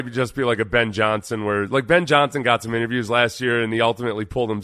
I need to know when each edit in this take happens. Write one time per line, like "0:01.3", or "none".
none